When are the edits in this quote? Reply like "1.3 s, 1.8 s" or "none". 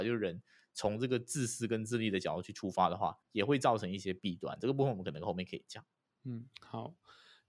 3.2 s, 6.1 s